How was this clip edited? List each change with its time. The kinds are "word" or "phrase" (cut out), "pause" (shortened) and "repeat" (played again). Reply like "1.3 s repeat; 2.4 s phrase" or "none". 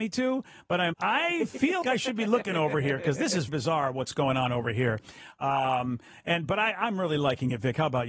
0.9 s word; 1.8 s word; 3.5 s word